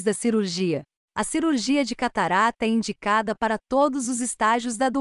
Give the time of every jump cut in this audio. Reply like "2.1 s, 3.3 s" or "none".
none